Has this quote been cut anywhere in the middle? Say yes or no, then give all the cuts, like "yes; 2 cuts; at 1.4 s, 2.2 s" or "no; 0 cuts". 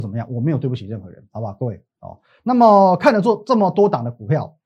no; 0 cuts